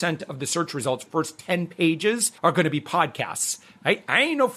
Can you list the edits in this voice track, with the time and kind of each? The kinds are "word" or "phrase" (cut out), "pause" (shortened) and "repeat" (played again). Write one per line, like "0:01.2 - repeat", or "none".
0:01.1 - word
0:02.4 - pause